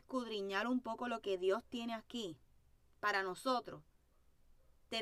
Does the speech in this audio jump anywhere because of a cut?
no; 0 cuts

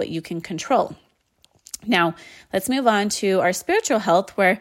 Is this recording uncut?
yes; 0 cuts

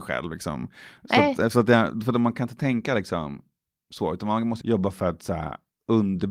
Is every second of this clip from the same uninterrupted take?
no; 1 cut; at 4.6 s

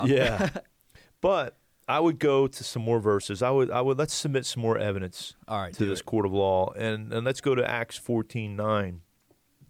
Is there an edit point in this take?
no; 0 cuts

